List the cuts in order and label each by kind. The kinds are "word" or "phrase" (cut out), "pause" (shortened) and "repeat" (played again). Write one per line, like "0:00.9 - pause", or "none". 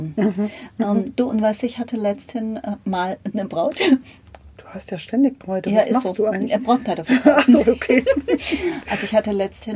none